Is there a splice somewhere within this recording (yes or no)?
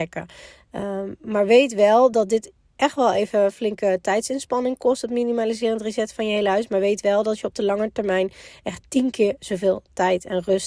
no